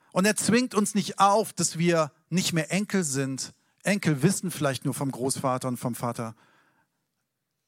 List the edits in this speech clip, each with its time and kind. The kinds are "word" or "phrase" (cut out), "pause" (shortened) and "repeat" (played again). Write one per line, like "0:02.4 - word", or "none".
none